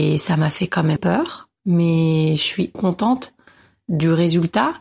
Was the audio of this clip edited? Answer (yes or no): yes